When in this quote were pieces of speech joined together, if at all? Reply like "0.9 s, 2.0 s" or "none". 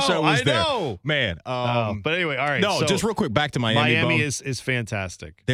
none